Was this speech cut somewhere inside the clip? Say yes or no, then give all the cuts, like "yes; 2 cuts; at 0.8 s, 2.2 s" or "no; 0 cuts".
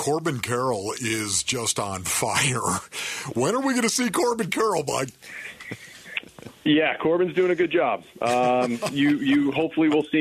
yes; 1 cut; at 6.6 s